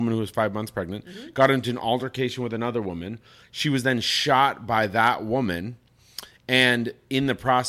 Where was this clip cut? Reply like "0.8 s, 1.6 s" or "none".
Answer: none